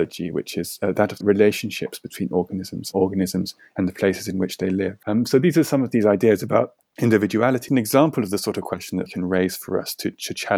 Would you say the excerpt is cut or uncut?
cut